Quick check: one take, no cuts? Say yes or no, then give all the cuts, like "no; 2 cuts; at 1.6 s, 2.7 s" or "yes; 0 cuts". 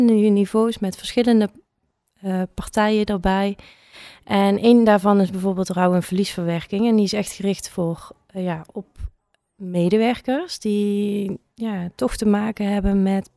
yes; 0 cuts